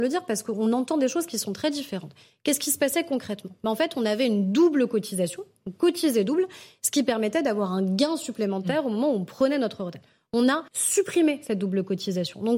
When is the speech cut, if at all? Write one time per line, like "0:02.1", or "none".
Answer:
0:10.7